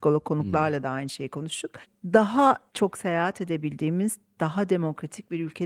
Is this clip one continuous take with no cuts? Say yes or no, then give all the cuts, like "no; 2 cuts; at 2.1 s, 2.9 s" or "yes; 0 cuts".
yes; 0 cuts